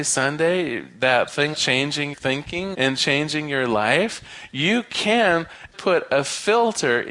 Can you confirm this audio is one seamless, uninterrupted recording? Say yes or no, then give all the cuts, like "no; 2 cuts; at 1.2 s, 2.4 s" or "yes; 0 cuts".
no; 4 cuts; at 1.5 s, 2.1 s, 2.7 s, 5.7 s